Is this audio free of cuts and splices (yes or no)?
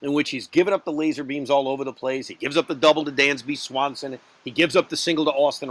yes